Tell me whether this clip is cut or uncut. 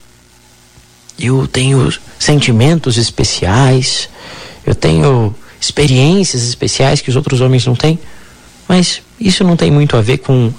cut